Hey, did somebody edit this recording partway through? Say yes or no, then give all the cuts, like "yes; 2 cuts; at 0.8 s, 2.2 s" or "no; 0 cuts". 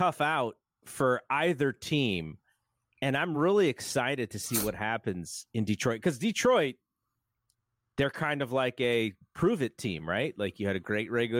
no; 0 cuts